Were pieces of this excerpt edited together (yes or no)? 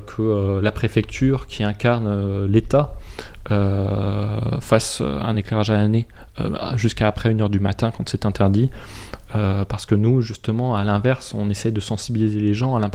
no